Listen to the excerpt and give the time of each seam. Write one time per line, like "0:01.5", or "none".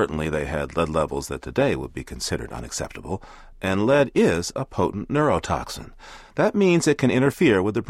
none

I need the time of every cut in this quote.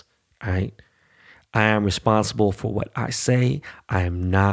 none

